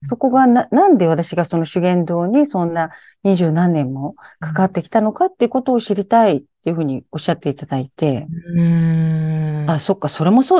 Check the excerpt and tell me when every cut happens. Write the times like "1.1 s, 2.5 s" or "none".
none